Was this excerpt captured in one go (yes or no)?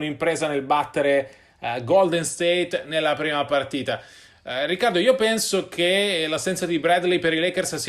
yes